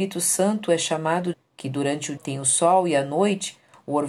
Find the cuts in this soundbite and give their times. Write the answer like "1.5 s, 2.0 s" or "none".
1.3 s, 2.2 s